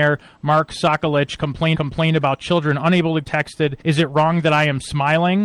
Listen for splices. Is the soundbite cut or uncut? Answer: cut